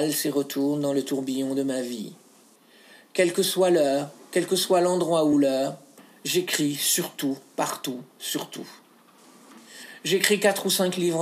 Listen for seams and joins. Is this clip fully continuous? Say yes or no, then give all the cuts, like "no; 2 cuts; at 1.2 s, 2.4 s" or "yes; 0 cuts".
yes; 0 cuts